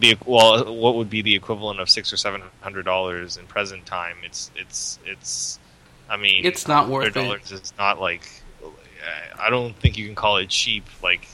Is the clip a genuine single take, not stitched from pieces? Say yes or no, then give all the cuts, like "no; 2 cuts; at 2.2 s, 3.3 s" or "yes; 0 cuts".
yes; 0 cuts